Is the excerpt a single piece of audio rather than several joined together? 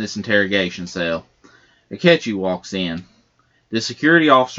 yes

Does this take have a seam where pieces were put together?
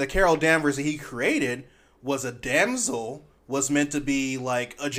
no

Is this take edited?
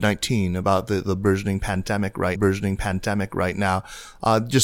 yes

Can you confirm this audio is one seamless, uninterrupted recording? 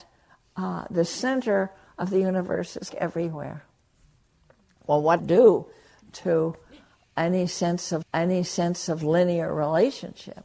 no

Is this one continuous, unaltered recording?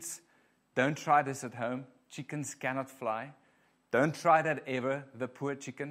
yes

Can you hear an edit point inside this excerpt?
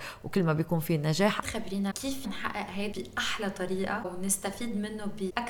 yes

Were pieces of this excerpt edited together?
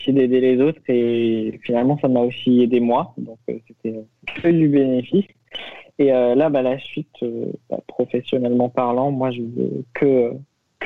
no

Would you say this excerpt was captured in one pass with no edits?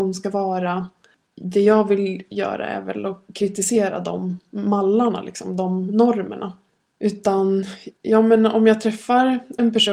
yes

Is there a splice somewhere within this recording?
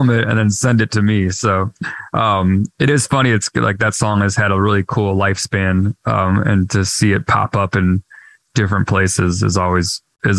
no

